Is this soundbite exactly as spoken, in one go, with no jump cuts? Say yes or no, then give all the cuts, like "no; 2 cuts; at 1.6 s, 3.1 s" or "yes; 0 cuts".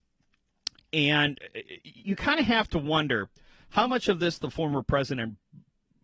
no; 1 cut; at 2.0 s